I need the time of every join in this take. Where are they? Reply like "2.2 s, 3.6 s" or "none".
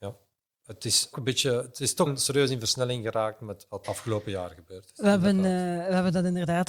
1.1 s, 2.1 s, 3.8 s